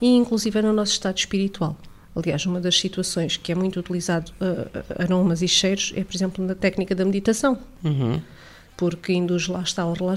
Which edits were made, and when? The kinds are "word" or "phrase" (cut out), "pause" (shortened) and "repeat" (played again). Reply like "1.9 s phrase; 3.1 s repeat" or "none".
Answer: none